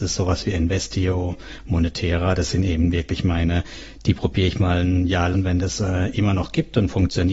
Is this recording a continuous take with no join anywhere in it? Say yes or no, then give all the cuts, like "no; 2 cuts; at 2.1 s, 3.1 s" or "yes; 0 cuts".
no; 1 cut; at 5.3 s